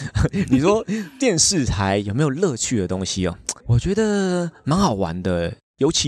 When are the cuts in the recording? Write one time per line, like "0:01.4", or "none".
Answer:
0:03.6